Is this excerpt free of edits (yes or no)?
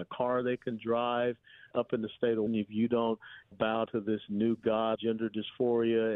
no